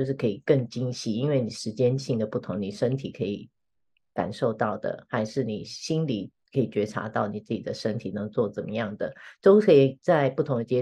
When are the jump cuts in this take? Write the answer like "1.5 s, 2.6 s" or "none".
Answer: none